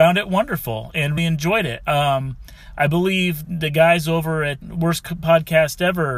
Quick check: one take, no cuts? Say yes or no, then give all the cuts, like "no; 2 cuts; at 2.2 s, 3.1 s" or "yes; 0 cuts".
no; 3 cuts; at 1.2 s, 3.4 s, 4.6 s